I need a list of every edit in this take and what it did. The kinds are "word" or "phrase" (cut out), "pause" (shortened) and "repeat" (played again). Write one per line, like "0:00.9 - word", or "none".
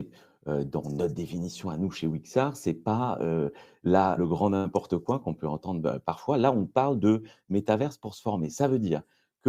0:04.2 - word